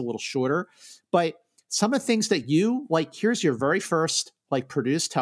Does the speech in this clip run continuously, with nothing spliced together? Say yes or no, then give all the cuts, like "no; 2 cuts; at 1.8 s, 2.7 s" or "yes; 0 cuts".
yes; 0 cuts